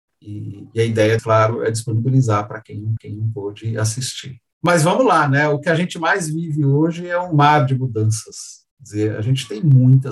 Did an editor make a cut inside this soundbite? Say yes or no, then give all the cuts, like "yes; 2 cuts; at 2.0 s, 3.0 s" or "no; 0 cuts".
yes; 3 cuts; at 1.2 s, 3.0 s, 4.5 s